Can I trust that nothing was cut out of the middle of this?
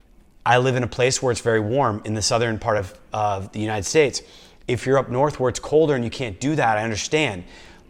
yes; 0 cuts

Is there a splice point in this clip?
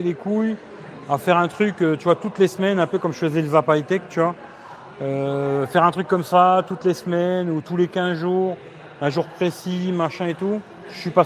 no; 0 cuts

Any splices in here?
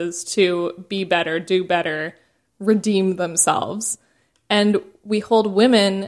no; 0 cuts

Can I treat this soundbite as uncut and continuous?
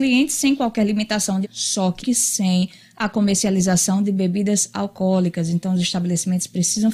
no; 2 cuts; at 1.4 s, 2.0 s

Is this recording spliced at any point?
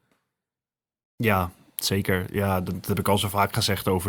no; 0 cuts

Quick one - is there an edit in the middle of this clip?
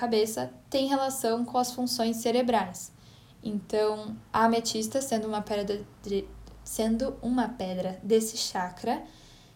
no; 0 cuts

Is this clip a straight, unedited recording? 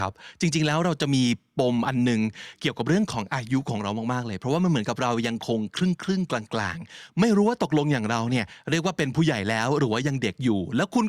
yes; 0 cuts

